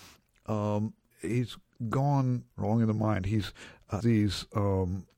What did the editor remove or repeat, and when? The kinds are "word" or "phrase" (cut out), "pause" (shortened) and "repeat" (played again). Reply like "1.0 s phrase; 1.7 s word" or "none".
1.1 s word; 2.5 s word; 4.0 s word